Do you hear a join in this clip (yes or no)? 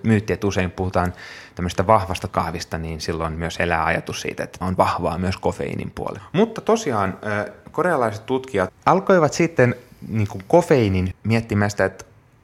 yes